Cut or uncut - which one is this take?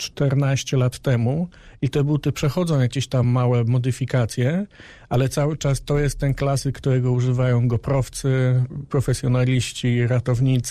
uncut